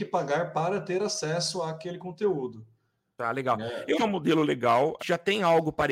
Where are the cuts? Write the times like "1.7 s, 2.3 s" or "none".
3.9 s, 5.0 s